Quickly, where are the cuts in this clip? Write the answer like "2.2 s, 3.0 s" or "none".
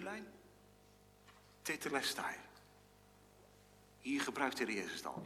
none